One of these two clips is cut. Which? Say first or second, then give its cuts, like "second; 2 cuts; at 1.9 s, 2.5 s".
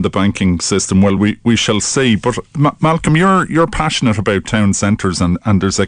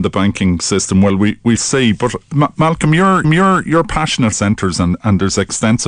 second; 3 cuts; at 1.6 s, 3.2 s, 4.3 s